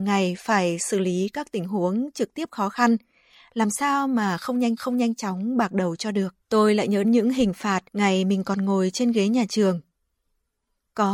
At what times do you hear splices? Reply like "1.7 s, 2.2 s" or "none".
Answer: 4.8 s, 6.4 s, 7.0 s, 7.9 s